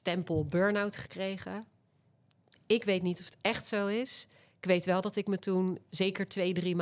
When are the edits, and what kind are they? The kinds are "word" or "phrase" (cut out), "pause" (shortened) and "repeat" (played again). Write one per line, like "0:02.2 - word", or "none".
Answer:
none